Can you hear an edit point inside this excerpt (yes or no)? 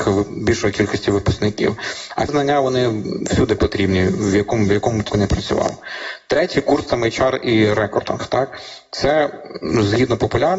yes